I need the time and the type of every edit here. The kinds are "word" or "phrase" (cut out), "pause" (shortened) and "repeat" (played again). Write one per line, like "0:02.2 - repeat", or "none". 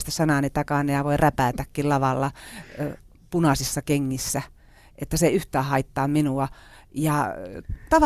none